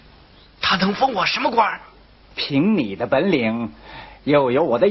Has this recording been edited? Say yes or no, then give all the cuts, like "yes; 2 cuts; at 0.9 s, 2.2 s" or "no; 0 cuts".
no; 0 cuts